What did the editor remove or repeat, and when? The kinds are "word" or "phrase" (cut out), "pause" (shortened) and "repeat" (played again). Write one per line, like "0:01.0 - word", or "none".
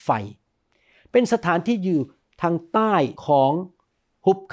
0:03.2 - pause